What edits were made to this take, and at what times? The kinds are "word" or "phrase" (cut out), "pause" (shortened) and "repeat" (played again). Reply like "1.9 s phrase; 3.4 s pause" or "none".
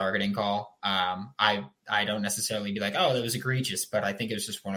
none